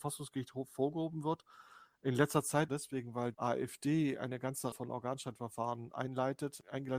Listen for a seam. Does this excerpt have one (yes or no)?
yes